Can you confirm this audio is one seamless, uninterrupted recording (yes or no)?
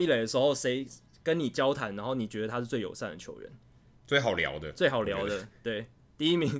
yes